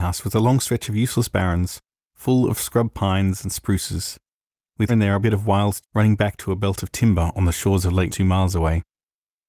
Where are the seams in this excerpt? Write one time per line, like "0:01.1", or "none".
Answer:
0:04.9
0:05.2
0:05.8
0:08.1